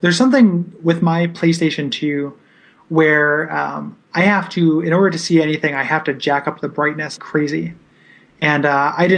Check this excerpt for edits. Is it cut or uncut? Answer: cut